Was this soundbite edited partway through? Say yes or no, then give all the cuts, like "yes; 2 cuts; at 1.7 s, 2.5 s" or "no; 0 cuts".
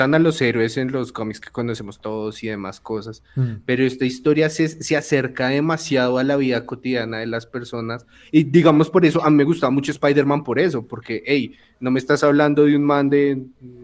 no; 0 cuts